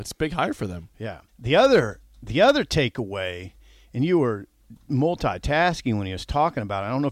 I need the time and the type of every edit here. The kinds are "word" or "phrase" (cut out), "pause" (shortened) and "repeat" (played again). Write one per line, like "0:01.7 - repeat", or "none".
0:01.3 - pause